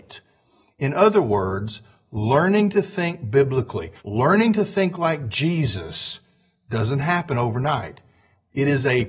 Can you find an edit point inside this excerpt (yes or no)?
yes